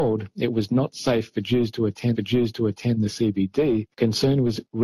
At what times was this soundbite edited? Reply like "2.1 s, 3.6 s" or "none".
2.1 s, 3.9 s